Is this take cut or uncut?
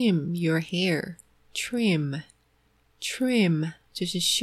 uncut